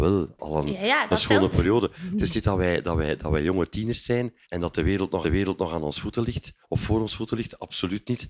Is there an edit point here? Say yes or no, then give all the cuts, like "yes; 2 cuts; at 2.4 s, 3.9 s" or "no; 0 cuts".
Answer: yes; 3 cuts; at 4.4 s, 5.2 s, 6.6 s